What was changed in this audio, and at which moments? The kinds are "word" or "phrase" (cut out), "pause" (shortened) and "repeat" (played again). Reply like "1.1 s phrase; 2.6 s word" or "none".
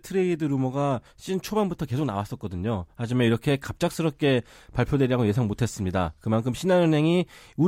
none